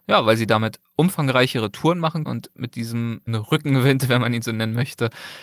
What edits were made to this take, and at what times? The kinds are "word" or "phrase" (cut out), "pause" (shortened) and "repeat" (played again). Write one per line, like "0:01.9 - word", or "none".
0:02.3 - word
0:03.3 - word